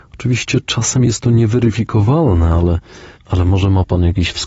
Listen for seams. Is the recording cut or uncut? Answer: cut